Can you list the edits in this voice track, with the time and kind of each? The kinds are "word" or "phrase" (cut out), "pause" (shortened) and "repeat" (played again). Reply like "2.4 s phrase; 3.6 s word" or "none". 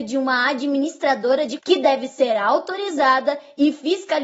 1.6 s word